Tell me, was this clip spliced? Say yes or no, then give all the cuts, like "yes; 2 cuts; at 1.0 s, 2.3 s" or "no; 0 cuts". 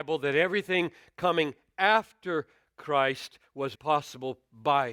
yes; 1 cut; at 3.7 s